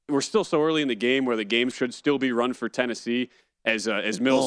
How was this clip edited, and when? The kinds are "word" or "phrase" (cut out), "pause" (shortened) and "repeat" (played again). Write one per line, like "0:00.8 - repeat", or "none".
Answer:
0:01.7 - word
0:02.5 - word